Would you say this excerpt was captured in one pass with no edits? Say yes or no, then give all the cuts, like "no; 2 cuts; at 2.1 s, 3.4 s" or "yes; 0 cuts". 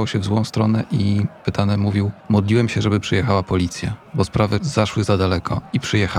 no; 1 cut; at 2.2 s